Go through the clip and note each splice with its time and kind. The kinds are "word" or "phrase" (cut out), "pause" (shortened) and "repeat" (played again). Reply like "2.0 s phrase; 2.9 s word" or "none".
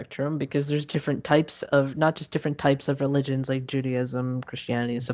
none